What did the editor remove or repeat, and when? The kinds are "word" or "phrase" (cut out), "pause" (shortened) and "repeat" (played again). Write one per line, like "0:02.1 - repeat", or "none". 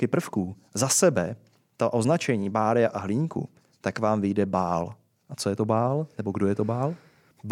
none